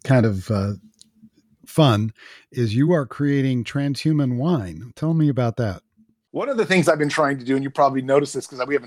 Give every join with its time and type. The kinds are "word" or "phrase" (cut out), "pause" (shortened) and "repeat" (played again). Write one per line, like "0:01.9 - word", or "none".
none